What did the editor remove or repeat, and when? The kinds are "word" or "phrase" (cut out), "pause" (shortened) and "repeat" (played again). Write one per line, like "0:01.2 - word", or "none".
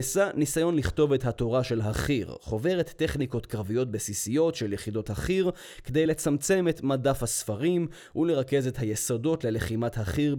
none